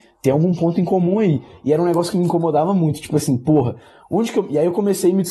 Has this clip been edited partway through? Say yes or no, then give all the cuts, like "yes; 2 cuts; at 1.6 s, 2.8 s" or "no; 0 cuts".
no; 0 cuts